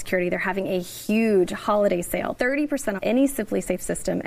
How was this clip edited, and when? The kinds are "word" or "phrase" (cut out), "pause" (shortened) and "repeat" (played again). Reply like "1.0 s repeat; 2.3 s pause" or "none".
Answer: 2.3 s word; 3.0 s word